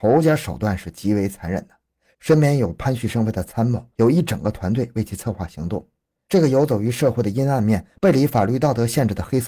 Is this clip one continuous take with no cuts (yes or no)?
yes